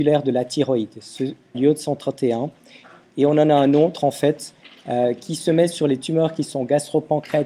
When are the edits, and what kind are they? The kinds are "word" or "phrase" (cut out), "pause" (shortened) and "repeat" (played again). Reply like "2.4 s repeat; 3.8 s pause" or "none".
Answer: 1.5 s phrase